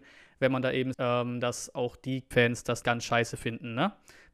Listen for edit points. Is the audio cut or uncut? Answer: cut